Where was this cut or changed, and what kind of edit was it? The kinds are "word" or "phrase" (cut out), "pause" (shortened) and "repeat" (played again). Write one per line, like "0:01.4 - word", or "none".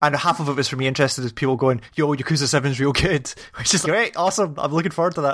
0:03.8 - word